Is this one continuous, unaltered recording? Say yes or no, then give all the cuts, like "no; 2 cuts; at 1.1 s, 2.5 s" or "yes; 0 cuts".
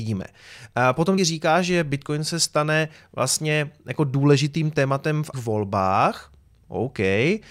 no; 2 cuts; at 1.2 s, 5.3 s